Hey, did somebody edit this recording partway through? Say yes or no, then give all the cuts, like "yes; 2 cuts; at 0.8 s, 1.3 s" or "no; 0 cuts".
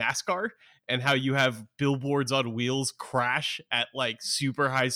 no; 0 cuts